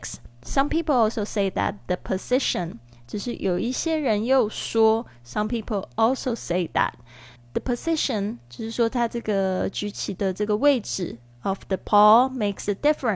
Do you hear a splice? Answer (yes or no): yes